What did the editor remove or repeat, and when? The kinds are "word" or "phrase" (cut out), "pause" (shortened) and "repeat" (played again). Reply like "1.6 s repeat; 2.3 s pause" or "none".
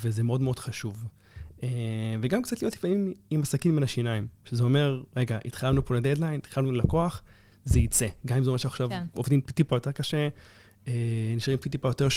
none